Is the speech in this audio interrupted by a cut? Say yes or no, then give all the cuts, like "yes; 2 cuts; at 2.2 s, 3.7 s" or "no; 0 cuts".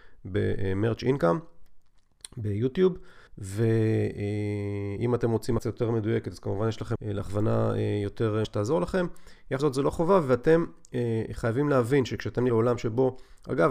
yes; 6 cuts; at 3.3 s, 5.6 s, 7.0 s, 8.4 s, 9.6 s, 12.5 s